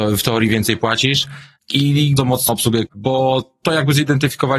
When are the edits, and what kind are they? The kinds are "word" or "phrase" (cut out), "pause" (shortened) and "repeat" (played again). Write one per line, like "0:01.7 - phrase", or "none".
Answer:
0:02.2 - word
0:02.5 - word
0:02.9 - word